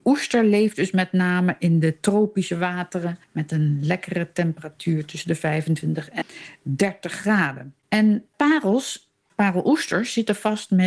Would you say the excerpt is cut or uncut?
cut